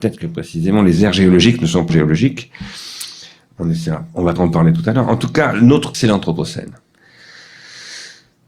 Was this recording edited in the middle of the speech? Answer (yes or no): yes